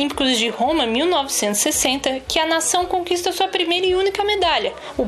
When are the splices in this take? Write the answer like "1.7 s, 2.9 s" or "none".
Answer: none